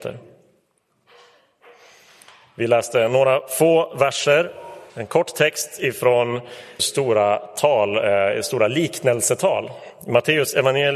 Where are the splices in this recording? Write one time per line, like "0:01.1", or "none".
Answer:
0:04.9
0:06.8